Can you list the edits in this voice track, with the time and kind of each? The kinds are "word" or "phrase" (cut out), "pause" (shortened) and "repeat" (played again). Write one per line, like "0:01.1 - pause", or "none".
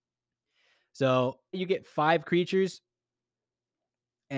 0:01.5 - word

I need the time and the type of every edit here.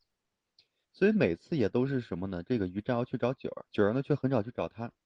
0:03.7 - pause

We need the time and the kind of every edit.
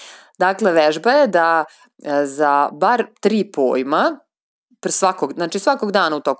none

